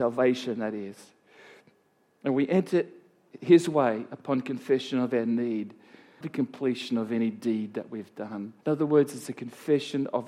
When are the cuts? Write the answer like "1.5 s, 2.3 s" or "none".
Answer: 6.2 s, 8.6 s